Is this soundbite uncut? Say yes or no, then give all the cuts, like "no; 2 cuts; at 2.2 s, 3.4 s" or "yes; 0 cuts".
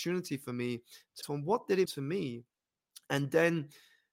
no; 2 cuts; at 1.2 s, 1.9 s